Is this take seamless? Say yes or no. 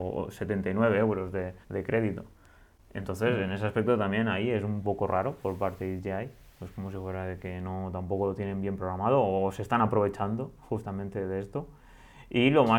no